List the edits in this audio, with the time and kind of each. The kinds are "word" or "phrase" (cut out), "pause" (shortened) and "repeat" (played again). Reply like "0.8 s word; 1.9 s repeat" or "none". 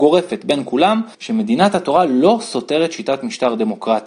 1.1 s pause

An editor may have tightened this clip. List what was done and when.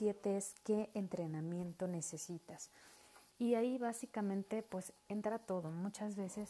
3.3 s pause

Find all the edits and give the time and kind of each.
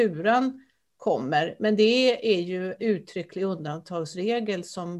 2.8 s word

